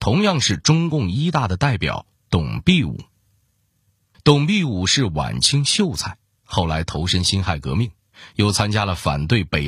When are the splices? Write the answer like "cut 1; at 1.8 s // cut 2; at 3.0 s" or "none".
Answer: none

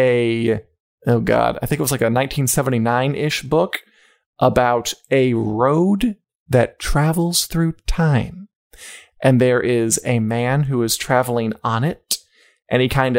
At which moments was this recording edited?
none

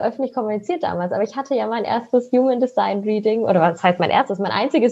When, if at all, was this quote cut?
none

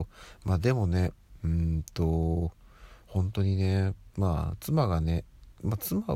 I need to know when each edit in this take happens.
cut 1; at 4.1 s

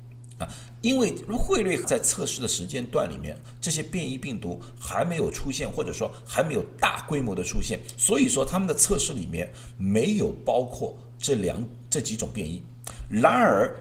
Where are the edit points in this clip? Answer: cut 1; at 1.8 s

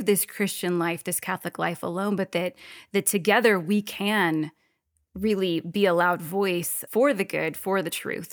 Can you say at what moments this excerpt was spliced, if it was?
cut 1; at 6.9 s

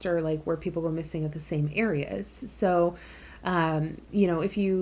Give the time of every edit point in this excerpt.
none

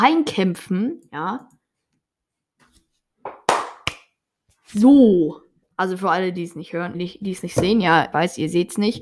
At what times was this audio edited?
cut 1; at 5.6 s // cut 2; at 6.9 s // cut 3; at 8.1 s

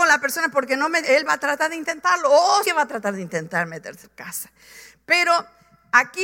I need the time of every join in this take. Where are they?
cut 1; at 1.0 s // cut 2; at 2.6 s // cut 3; at 4.0 s

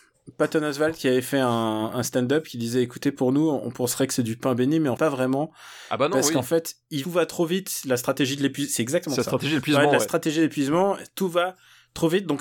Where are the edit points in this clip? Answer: cut 1; at 5.0 s // cut 2; at 7.0 s

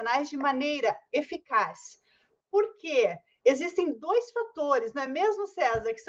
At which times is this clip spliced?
none

